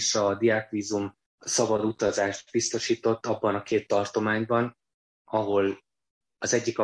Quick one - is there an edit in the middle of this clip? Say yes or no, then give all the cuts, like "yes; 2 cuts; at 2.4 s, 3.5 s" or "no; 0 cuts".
no; 0 cuts